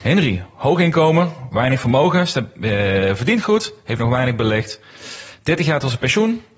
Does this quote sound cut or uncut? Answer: uncut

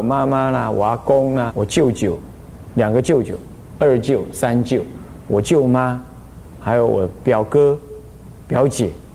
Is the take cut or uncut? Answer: cut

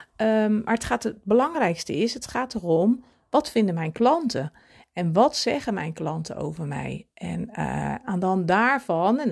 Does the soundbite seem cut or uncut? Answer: uncut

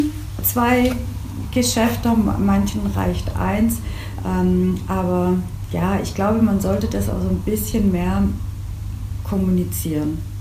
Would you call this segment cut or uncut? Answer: uncut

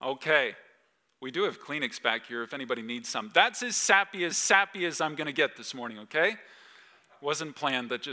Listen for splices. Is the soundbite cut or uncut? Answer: cut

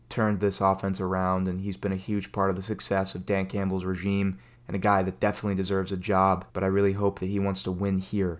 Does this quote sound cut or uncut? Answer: cut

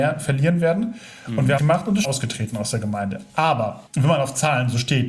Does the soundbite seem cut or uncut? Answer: cut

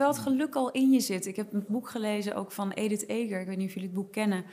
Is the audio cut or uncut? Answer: cut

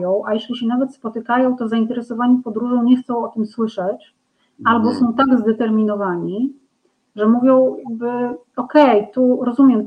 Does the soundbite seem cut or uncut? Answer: uncut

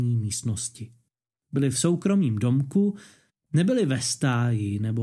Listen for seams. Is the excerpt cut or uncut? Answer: uncut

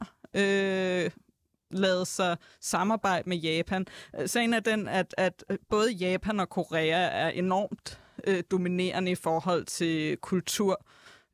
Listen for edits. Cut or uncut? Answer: uncut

